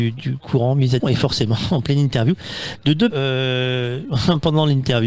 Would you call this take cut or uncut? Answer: cut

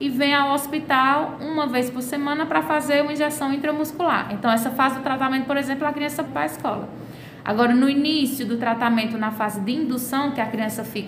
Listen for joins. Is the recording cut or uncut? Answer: cut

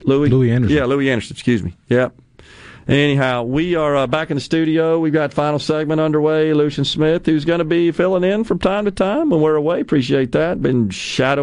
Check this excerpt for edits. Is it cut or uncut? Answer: uncut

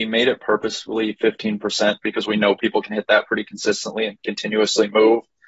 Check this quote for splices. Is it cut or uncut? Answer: uncut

